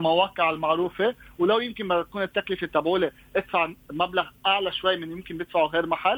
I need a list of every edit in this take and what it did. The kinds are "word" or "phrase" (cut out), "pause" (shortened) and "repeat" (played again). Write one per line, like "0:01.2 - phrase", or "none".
none